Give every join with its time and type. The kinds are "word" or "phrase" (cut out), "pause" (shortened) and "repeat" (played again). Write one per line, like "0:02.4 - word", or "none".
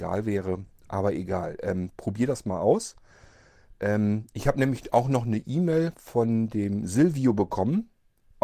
none